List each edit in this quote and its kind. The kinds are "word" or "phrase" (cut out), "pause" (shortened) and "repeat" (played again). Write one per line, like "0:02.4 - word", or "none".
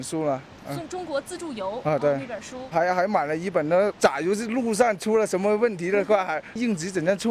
0:02.7 - word